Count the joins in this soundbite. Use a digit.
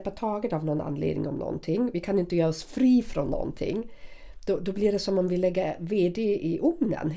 0